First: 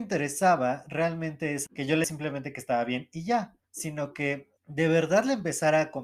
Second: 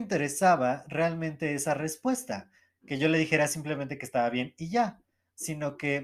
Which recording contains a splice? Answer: first; 4 cuts; at 1.7 s, 2.0 s, 3.6 s, 4.6 s

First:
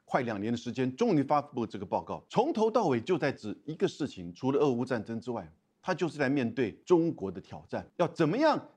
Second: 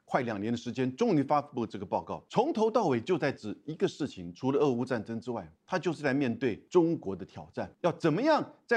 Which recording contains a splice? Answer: second; 1 cut; at 5.6 s

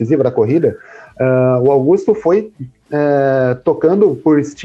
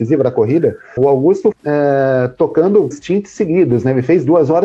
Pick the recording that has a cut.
second; 3 cuts; at 1.0 s, 1.5 s, 2.9 s

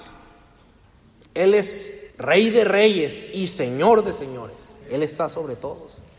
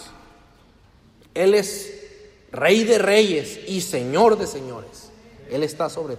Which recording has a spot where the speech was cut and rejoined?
first; 2 cuts; at 2.1 s, 4.8 s

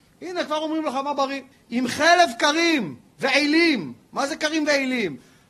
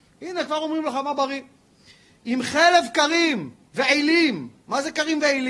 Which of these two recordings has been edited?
first; 1 cut; at 1.5 s

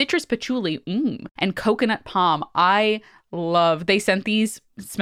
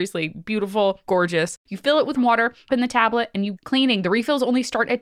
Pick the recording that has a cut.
second; 4 cuts; at 1.0 s, 2.2 s, 2.7 s, 3.5 s

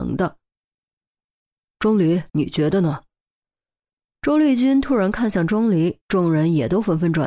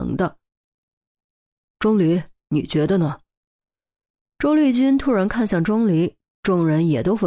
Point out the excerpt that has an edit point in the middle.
first; 2 cuts; at 2.3 s, 6.0 s

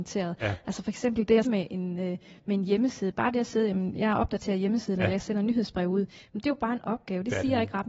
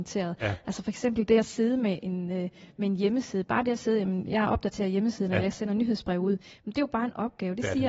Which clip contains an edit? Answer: first; 1 cut; at 1.4 s

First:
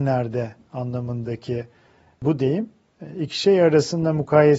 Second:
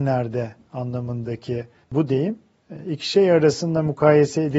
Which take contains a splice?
second; 1 cut; at 1.8 s

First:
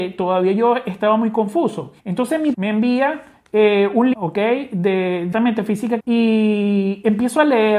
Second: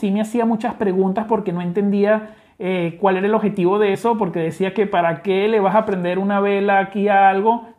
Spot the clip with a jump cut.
first; 5 cuts; at 2.0 s, 2.5 s, 4.1 s, 5.3 s, 6.0 s

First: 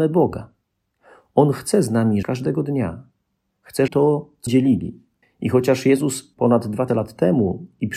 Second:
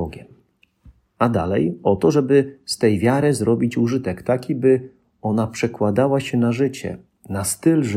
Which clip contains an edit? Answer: first; 6 cuts; at 2.2 s, 3.9 s, 4.5 s, 5.2 s, 6.3 s, 6.9 s

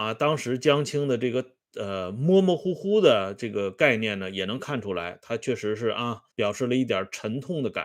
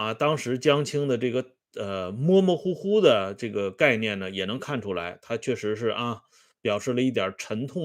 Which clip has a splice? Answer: first; 1 cut; at 6.3 s

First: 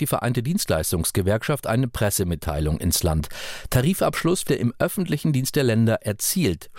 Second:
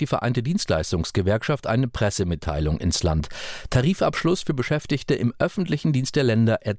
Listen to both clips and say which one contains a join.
first; 1 cut; at 4.5 s

